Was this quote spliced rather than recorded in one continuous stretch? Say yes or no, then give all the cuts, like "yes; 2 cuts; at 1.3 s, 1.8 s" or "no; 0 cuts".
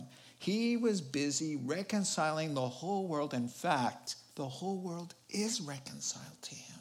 yes; 1 cut; at 4.3 s